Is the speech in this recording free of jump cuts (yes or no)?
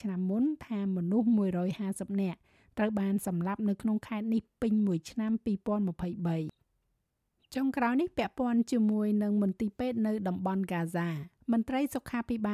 no